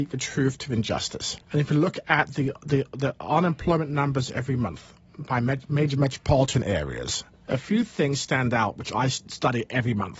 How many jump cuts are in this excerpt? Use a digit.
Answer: 1